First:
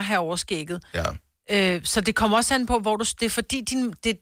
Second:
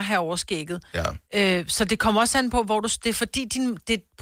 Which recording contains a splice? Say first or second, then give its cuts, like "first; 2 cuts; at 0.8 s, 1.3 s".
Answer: second; 1 cut; at 1.2 s